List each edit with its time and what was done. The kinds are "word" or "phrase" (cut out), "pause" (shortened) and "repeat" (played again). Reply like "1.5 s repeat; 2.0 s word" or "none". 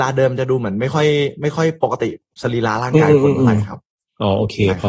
none